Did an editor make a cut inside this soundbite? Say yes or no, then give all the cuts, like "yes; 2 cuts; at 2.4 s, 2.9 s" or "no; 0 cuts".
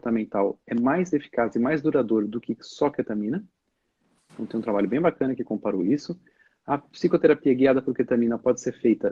no; 0 cuts